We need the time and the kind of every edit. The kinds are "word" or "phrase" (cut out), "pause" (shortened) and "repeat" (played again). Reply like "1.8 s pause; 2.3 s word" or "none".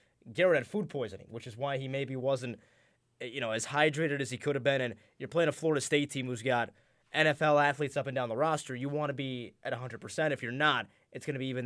none